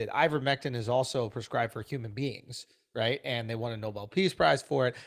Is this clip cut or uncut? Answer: uncut